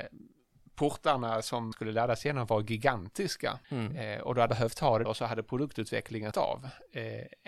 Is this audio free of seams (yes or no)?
no